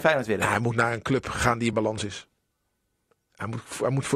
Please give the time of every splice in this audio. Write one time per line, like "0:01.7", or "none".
none